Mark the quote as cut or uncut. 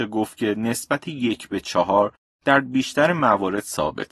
uncut